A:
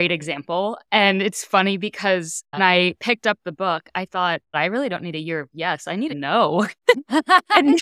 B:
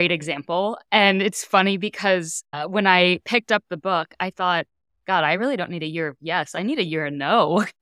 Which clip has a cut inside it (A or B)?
A